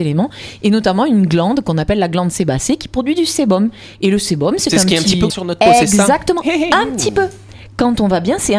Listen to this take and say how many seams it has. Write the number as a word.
one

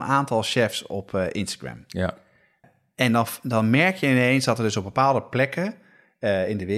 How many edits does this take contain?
zero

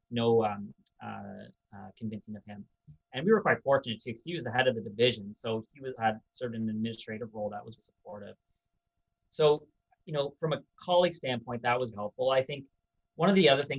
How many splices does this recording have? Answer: four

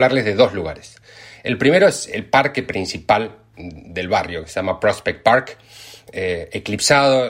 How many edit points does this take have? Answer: zero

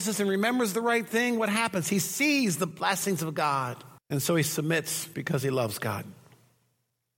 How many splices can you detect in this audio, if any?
one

